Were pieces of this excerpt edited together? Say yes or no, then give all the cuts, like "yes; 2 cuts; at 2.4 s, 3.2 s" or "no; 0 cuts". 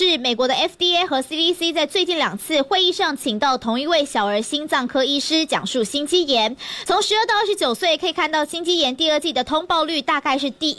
no; 0 cuts